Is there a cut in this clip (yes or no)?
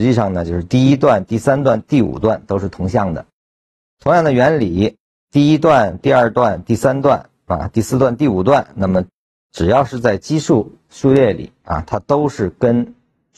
no